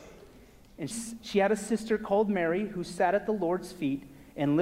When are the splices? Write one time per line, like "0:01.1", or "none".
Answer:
0:00.9